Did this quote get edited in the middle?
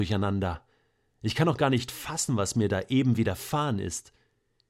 no; 0 cuts

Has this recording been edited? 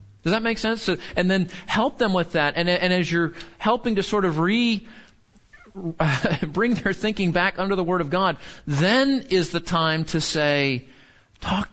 no; 0 cuts

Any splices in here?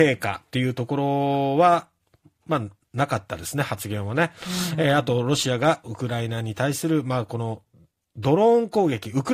no; 0 cuts

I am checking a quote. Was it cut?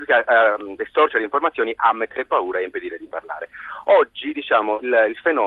no; 0 cuts

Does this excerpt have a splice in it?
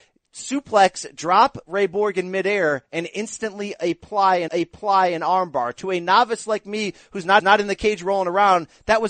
yes; 2 cuts; at 4.5 s, 7.4 s

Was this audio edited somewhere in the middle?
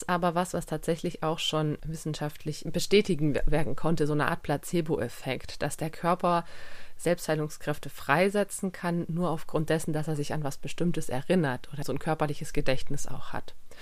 yes; 2 cuts; at 2.6 s, 11.8 s

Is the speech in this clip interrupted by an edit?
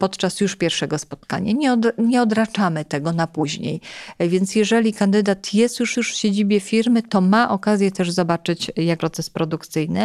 yes; 2 cuts; at 5.9 s, 9.0 s

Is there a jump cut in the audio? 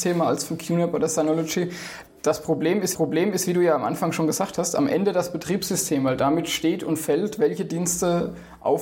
yes; 1 cut; at 2.9 s

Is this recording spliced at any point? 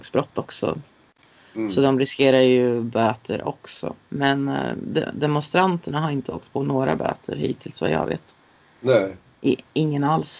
no; 0 cuts

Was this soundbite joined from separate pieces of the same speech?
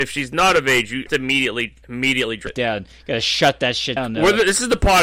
yes; 4 cuts; at 1.1 s, 1.8 s, 2.5 s, 4.0 s

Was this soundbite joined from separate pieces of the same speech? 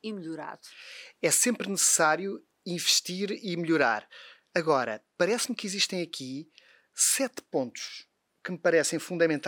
no; 0 cuts

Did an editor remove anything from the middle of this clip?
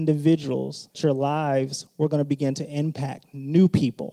yes; 1 cut; at 0.9 s

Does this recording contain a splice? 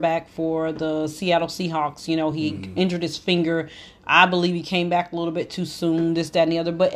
no; 0 cuts

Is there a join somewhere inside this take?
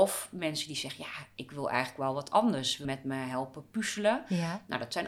yes; 1 cut; at 2.8 s

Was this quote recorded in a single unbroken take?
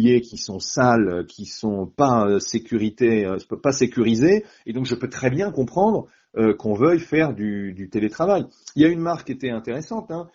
yes; 0 cuts

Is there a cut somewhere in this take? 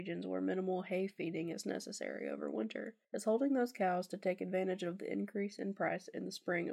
yes; 1 cut; at 3.0 s

